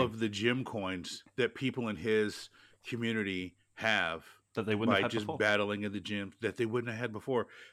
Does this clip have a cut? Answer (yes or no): no